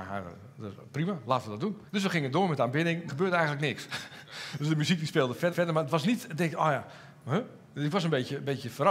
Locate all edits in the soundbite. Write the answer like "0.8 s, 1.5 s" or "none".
1.9 s, 3.1 s, 5.5 s